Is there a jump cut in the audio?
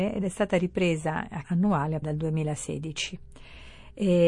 yes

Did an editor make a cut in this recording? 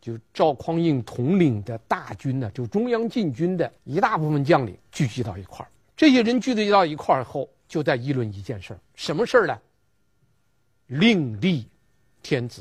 yes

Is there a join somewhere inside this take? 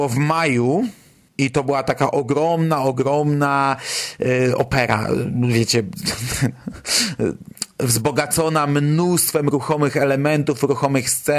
no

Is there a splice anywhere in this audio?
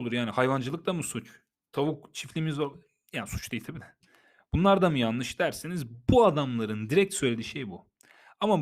no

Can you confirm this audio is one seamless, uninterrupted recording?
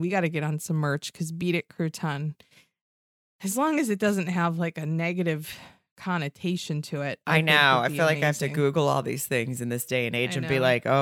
yes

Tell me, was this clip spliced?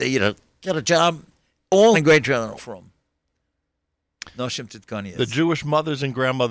yes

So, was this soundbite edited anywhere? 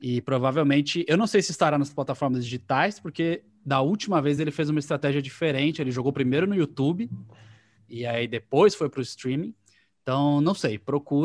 no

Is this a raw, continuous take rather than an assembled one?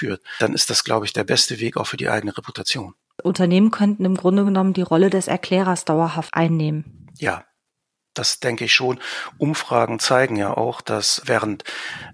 yes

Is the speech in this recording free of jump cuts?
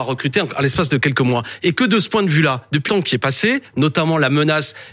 no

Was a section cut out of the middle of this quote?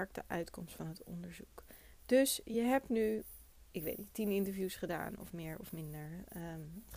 no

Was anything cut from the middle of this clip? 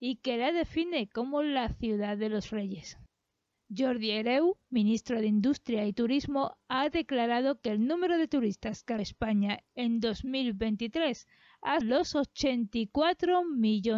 yes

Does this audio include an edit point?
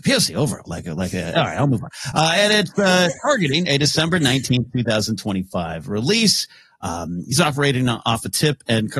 no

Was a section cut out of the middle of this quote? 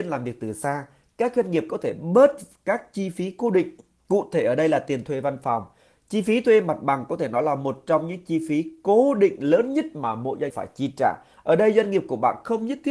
yes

